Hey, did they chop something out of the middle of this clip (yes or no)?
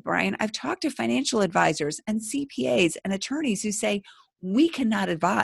no